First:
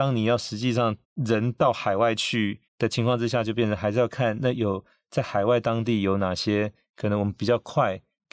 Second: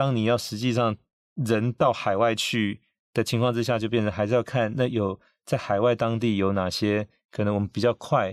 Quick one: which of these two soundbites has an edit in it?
first; 2 cuts; at 1.0 s, 2.7 s

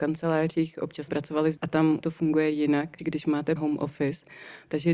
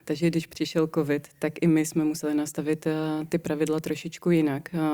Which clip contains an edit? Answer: first; 5 cuts; at 1.1 s, 1.6 s, 2.0 s, 3.0 s, 3.6 s

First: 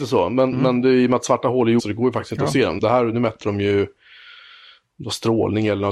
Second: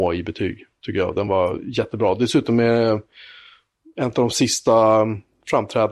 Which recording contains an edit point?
first; 2 cuts; at 1.8 s, 2.8 s

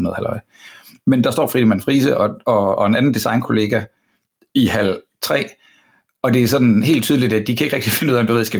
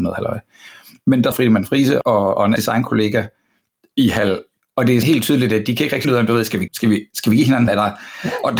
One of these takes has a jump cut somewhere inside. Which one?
second; 8 cuts; at 1.3 s, 2.0 s, 2.6 s, 4.6 s, 5.0 s, 6.0 s, 6.7 s, 7.7 s

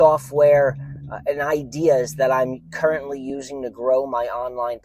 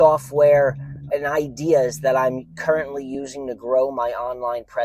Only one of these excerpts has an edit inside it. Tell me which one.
second; 1 cut; at 1.1 s

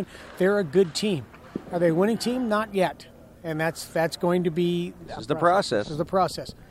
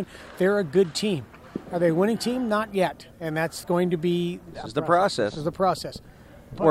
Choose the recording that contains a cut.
second; 2 cuts; at 3.1 s, 3.6 s

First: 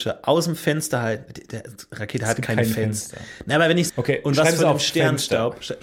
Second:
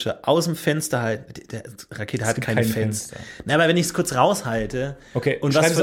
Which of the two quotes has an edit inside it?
first; 1 cut; at 3.9 s

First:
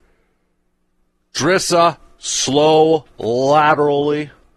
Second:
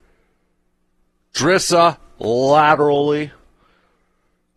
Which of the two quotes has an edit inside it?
second; 1 cut; at 2.1 s

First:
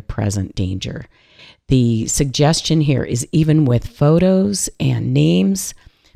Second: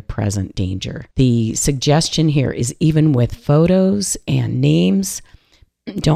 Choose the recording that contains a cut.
second; 1 cut; at 1.1 s

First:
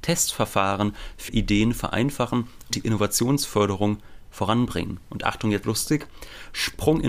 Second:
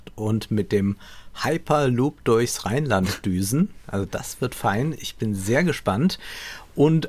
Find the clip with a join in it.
first; 3 cuts; at 1.3 s, 2.7 s, 5.6 s

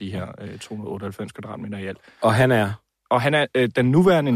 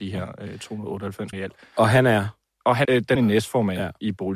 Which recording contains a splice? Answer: second; 3 cuts; at 1.3 s, 2.8 s, 3.1 s

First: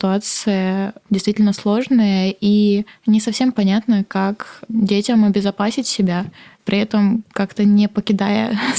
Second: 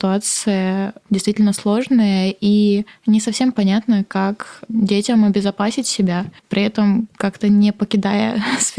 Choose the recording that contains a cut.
second; 1 cut; at 6.4 s

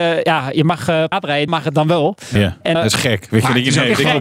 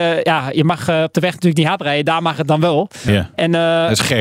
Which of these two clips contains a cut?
first; 3 cuts; at 1.1 s, 1.5 s, 2.7 s

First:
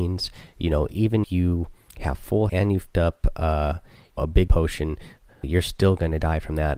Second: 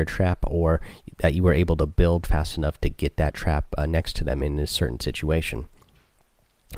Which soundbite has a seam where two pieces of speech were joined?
first; 7 cuts; at 1.2 s, 1.9 s, 2.5 s, 2.9 s, 4.2 s, 4.5 s, 5.4 s

